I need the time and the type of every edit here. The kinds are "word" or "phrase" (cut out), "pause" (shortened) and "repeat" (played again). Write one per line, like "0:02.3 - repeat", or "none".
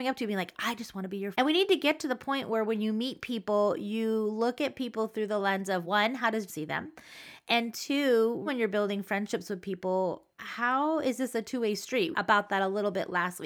0:01.3 - word
0:05.8 - word
0:06.5 - word
0:08.5 - word
0:10.3 - pause
0:12.1 - phrase